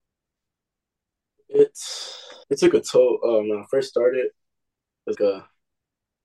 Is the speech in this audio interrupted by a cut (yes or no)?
yes